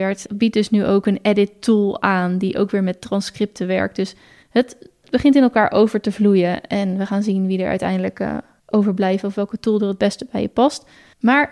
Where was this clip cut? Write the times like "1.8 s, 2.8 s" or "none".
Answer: none